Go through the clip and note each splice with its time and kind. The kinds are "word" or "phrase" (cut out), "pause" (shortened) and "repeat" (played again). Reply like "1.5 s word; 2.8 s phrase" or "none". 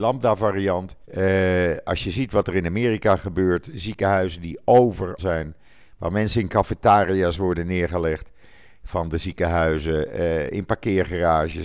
1.0 s pause; 5.2 s word